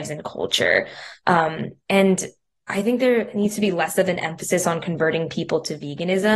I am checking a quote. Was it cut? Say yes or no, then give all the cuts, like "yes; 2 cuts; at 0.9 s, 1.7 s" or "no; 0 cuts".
no; 0 cuts